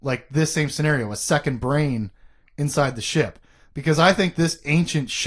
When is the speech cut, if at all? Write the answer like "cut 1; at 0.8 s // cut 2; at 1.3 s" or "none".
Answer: none

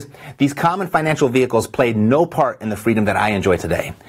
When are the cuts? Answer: none

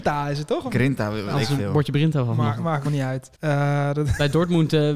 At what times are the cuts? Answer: cut 1; at 2.8 s // cut 2; at 3.3 s

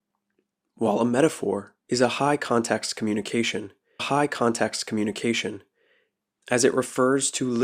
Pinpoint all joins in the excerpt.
cut 1; at 1.8 s // cut 2; at 4.0 s

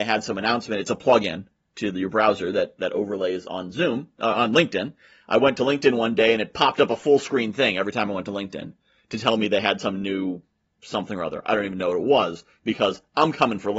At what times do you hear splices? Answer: none

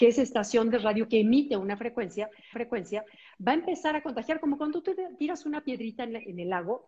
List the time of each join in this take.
cut 1; at 2.5 s

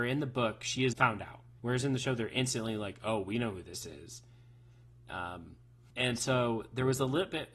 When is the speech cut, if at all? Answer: cut 1; at 0.9 s // cut 2; at 1.6 s

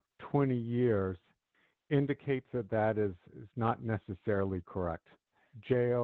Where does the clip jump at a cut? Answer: none

